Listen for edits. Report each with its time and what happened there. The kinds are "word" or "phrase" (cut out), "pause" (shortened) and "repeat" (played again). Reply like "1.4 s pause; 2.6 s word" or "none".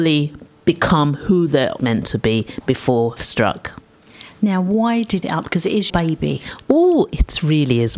1.8 s word; 3.2 s word; 5.2 s phrase; 5.9 s word